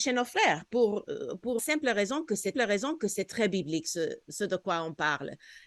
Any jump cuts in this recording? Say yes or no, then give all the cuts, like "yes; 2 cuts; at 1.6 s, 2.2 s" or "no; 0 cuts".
yes; 2 cuts; at 1.6 s, 2.5 s